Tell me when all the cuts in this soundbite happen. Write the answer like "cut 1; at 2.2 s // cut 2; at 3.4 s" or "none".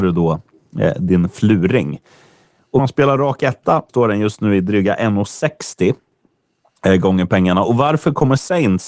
cut 1; at 2.8 s // cut 2; at 3.9 s